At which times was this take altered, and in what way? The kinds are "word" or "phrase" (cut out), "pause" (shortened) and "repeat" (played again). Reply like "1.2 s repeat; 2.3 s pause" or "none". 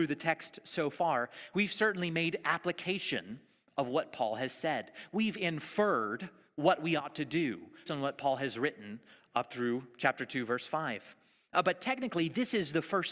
7.9 s word